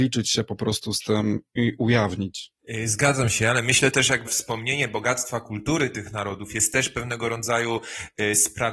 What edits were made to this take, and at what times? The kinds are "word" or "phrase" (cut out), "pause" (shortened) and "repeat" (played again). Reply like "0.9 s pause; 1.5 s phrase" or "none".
4.3 s word

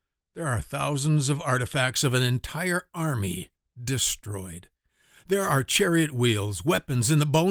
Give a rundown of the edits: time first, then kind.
none

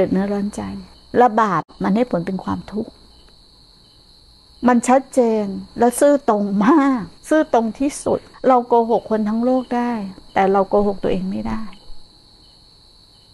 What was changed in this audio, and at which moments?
0.9 s pause; 5.7 s pause; 7.2 s pause; 8.3 s pause

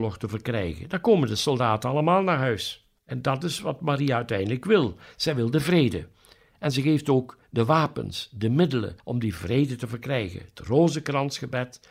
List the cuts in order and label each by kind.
3.0 s pause; 9.0 s pause

